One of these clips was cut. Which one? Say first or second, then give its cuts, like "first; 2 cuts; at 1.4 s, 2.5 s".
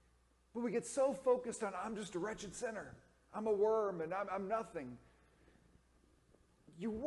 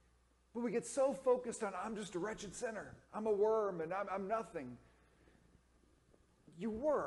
second; 1 cut; at 3.0 s